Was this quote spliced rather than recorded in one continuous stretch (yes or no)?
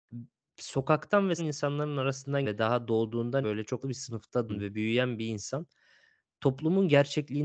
yes